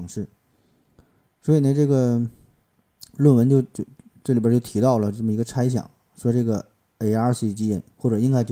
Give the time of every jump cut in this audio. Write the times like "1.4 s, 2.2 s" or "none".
none